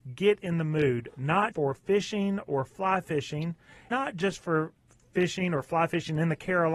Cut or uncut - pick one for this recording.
cut